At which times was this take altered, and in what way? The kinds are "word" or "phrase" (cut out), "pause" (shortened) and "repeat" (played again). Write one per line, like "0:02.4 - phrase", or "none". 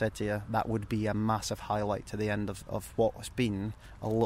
none